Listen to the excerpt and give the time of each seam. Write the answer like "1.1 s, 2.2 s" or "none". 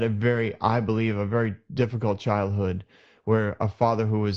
none

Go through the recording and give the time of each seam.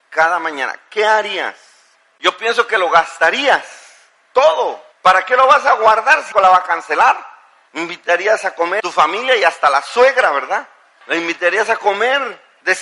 4.9 s, 6.3 s, 8.8 s

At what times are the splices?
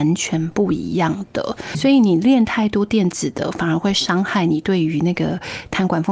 1.7 s

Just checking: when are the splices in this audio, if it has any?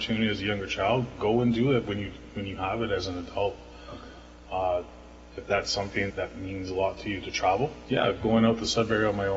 6.1 s, 7.9 s

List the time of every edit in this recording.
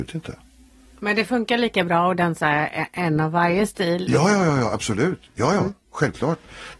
none

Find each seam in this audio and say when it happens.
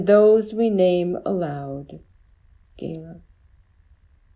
none

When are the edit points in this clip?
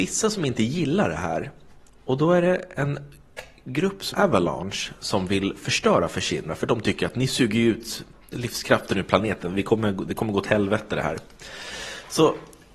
4.1 s

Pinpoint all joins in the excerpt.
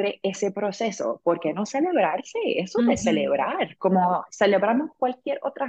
none

